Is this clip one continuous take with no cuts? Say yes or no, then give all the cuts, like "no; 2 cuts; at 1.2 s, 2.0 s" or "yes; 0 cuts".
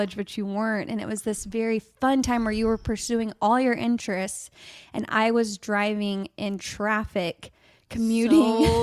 yes; 0 cuts